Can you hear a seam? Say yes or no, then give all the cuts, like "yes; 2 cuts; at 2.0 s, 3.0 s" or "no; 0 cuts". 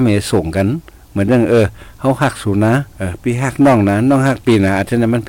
yes; 1 cut; at 2.9 s